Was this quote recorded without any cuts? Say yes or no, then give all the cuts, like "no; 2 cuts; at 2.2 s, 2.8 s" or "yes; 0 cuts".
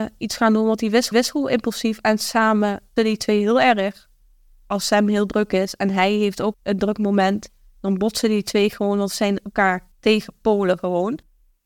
no; 4 cuts; at 1.1 s, 3.0 s, 6.5 s, 9.9 s